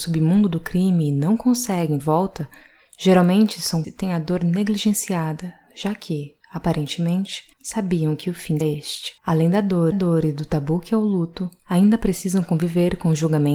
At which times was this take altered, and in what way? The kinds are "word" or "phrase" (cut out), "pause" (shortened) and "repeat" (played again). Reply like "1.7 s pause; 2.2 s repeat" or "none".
2.0 s phrase; 3.8 s word; 7.5 s pause; 8.6 s word; 9.2 s pause; 9.9 s repeat; 11.6 s pause